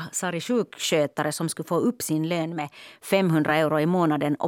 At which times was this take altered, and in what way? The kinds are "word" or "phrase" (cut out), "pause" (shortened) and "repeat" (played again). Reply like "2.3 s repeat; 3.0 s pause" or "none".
none